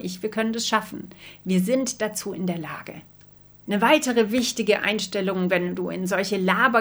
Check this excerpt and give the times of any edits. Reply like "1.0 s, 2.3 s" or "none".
none

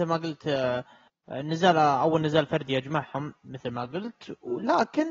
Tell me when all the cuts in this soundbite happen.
none

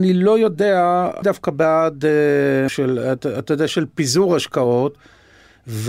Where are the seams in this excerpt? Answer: 1.2 s, 2.7 s, 3.7 s

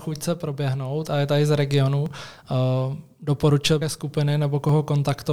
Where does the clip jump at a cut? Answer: 3.8 s

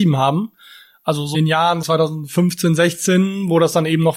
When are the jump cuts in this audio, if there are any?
1.3 s, 1.8 s

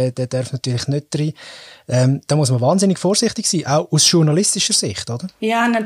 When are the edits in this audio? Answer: none

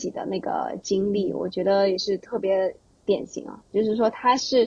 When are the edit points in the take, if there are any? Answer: none

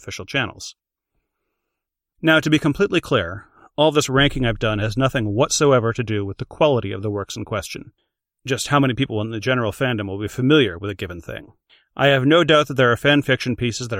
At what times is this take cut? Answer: 4.6 s

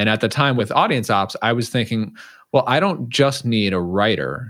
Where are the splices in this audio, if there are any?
none

